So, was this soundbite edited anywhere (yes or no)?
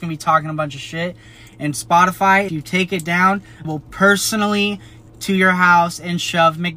yes